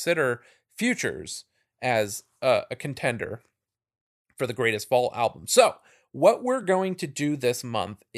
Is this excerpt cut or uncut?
uncut